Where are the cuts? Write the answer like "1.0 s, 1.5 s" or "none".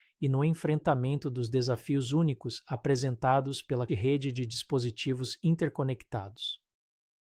3.9 s